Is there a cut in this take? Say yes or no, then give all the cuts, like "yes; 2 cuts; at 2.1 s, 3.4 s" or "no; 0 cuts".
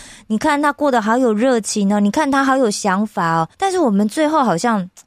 yes; 1 cut; at 3.5 s